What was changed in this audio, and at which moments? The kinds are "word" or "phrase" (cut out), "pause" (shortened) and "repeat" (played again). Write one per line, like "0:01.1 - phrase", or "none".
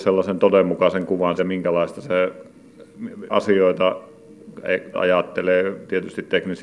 0:01.4 - word
0:03.3 - word
0:04.9 - word